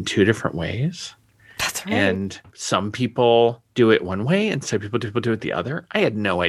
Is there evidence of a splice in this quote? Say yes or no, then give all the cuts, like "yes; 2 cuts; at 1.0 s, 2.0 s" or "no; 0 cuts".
yes; 3 cuts; at 2.5 s, 3.7 s, 5.0 s